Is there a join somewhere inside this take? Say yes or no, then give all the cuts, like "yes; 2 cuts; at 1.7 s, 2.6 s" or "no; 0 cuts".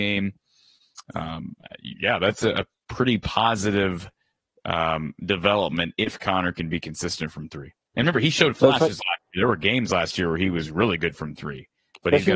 no; 0 cuts